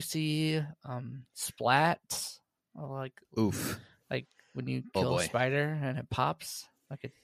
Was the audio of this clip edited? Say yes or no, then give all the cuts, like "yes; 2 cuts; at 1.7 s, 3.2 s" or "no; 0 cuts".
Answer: no; 0 cuts